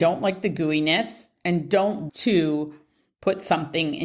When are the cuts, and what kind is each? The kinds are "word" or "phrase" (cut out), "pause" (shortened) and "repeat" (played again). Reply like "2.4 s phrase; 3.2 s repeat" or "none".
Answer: 2.1 s word